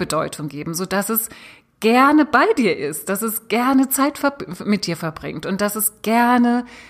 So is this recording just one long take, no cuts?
yes; 0 cuts

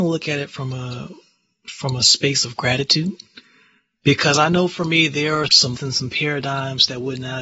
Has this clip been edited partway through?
yes; 1 cut; at 5.7 s

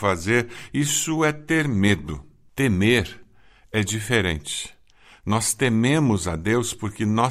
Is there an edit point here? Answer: no; 0 cuts

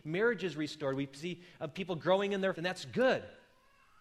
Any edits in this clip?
yes; 1 cut; at 2.6 s

